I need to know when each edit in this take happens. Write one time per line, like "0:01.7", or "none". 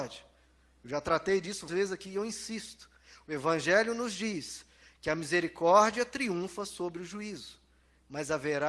0:01.7

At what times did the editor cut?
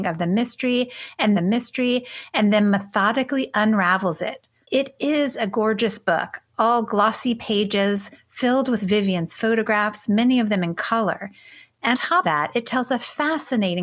0:01.3
0:11.9
0:12.2

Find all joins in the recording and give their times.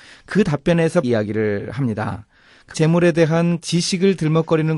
0:01.0
0:02.7
0:03.6

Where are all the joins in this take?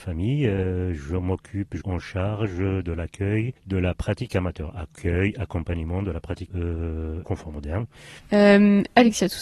0:01.8
0:03.6
0:06.5
0:07.2

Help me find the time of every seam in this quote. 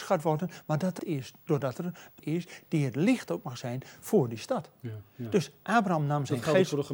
0:01.0
0:02.2

